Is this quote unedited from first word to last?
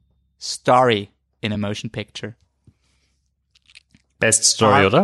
yes; 0 cuts

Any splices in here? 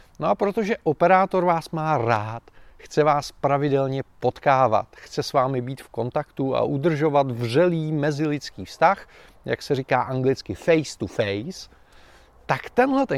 no; 0 cuts

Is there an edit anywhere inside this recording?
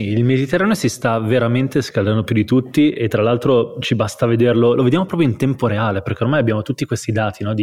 no; 0 cuts

